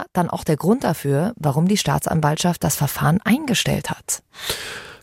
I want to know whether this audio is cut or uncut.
uncut